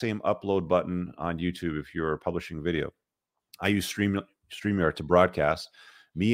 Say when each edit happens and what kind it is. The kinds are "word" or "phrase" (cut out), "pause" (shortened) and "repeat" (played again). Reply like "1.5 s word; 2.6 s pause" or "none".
none